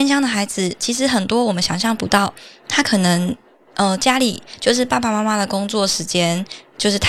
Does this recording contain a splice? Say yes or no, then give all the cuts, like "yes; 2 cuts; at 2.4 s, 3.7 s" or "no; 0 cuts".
no; 0 cuts